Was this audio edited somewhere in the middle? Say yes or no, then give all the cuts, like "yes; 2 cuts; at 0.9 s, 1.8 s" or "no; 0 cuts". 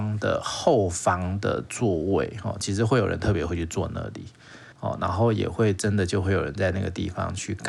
yes; 1 cut; at 4.7 s